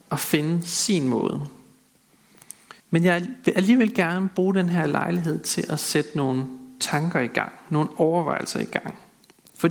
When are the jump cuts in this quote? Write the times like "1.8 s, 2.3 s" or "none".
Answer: 2.8 s